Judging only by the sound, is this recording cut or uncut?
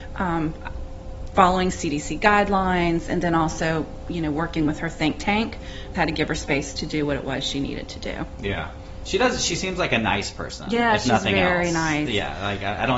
cut